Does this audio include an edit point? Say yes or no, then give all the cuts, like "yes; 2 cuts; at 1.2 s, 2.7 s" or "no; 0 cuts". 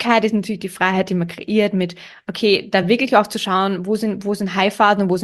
no; 0 cuts